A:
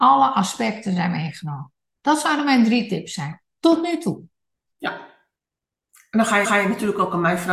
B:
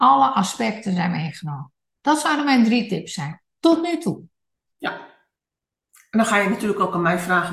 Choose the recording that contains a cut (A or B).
A